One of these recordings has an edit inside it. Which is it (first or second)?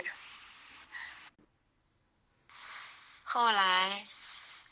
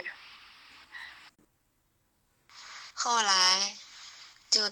second